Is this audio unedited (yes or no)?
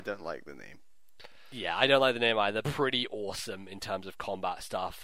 no